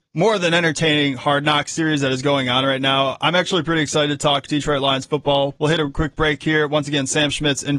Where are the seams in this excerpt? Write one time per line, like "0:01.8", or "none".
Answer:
none